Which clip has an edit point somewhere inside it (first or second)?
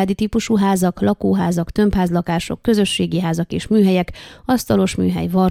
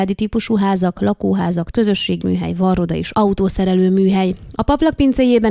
second